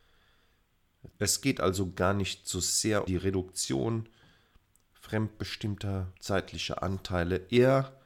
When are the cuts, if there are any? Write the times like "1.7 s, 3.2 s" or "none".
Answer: 1.1 s, 3.1 s, 6.2 s